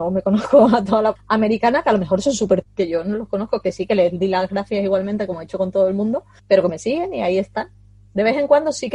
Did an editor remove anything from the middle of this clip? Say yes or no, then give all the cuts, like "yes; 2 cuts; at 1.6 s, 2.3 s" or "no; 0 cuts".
yes; 2 cuts; at 1.2 s, 2.6 s